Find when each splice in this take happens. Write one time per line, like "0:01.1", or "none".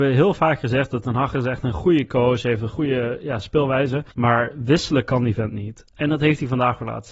0:04.1